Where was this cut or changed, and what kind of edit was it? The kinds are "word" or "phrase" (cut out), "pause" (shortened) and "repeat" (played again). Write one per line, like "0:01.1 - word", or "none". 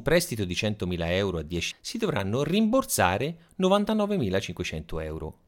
0:01.7 - word